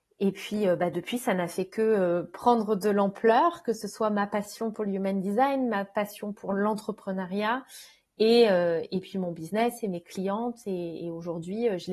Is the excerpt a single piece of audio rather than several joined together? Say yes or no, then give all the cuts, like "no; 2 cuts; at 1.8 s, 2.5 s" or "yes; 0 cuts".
yes; 0 cuts